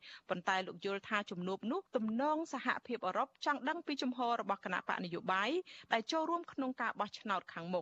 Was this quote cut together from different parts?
yes; 1 cut; at 1.9 s

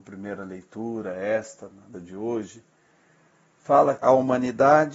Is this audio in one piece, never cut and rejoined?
no; 2 cuts; at 1.9 s, 4.0 s

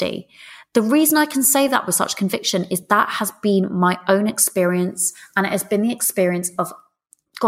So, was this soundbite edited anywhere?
no; 0 cuts

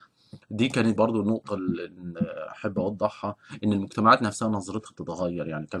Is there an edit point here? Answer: yes; 1 cut; at 1.0 s

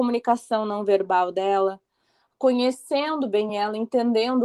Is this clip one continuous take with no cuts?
yes; 0 cuts

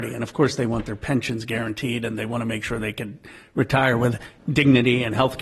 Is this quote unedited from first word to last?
yes; 0 cuts

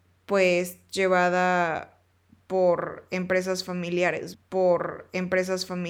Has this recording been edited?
yes; 1 cut; at 4.3 s

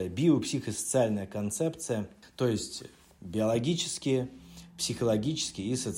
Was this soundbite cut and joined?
no; 0 cuts

